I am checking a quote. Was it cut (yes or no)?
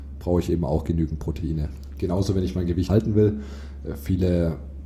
yes